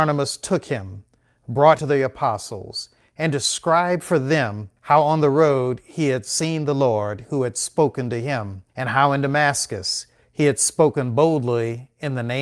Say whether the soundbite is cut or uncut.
cut